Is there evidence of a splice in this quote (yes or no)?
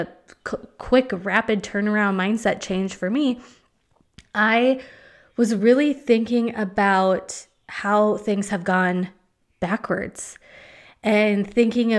no